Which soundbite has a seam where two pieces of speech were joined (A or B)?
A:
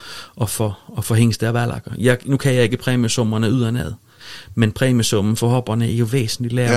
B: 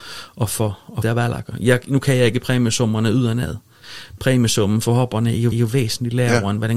B